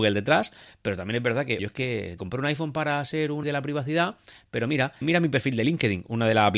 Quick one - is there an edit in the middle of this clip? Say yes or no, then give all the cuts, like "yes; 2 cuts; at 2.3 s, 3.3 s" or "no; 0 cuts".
yes; 4 cuts; at 1.6 s, 2.2 s, 3.4 s, 5.0 s